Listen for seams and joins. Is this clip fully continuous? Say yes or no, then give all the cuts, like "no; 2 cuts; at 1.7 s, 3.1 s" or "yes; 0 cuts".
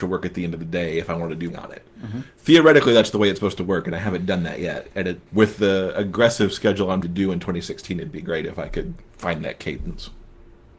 no; 4 cuts; at 1.5 s, 5.3 s, 7.0 s, 9.1 s